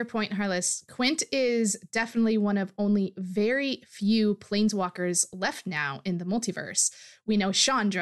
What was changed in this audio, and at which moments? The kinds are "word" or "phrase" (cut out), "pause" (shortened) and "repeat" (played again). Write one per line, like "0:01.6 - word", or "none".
none